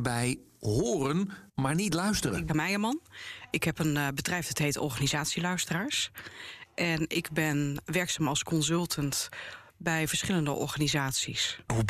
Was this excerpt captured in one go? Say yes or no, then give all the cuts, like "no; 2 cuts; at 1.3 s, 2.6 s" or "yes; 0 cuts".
no; 2 cuts; at 1.5 s, 2.5 s